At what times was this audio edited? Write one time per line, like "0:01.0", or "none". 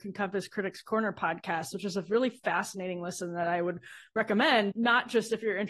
0:04.7